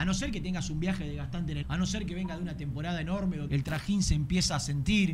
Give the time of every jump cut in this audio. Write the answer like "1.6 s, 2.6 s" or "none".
1.6 s, 3.5 s

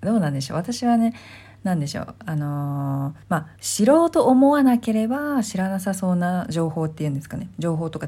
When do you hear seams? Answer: 3.2 s, 3.6 s

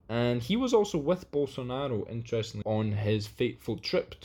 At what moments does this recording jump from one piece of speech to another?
2.6 s

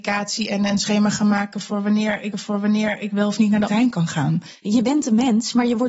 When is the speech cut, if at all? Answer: 2.3 s, 3.7 s

